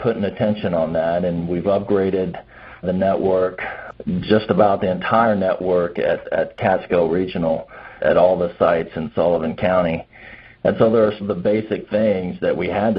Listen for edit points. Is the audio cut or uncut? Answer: cut